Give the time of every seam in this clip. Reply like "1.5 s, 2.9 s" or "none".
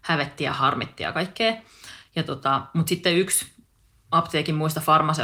none